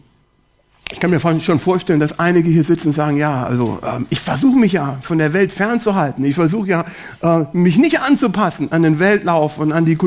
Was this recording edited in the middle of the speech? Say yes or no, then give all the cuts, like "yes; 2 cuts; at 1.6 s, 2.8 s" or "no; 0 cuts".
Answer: no; 0 cuts